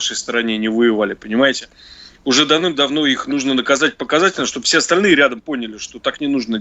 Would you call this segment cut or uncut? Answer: uncut